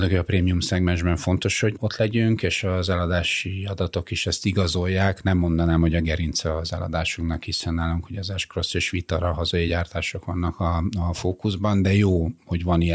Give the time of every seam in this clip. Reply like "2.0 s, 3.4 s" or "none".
none